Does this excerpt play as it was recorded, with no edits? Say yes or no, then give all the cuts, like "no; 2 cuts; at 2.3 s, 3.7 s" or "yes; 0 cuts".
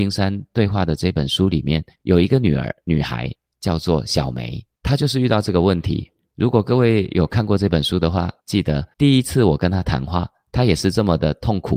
no; 3 cuts; at 1.9 s, 8.4 s, 8.9 s